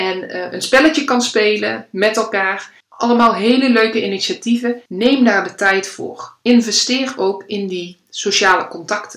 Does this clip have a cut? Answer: yes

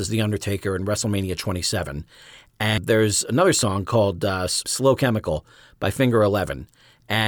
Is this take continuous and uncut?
yes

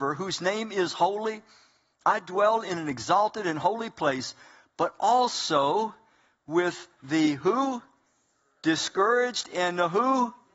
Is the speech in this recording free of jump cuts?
yes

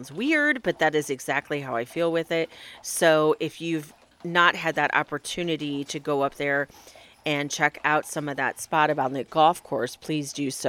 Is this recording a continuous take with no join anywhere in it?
yes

